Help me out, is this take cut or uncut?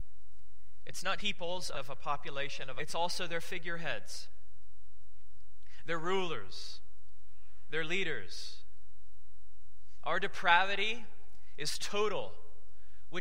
cut